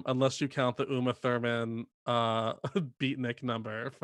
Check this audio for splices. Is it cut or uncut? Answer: uncut